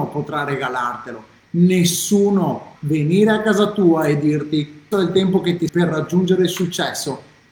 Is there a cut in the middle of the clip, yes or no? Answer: yes